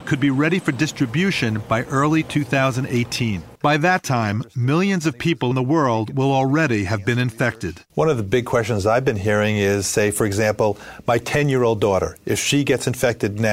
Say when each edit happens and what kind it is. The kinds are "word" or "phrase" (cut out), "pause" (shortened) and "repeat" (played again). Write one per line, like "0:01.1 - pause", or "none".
0:03.6 - pause
0:05.5 - word
0:07.9 - pause